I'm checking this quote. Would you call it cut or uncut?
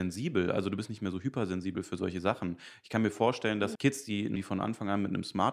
cut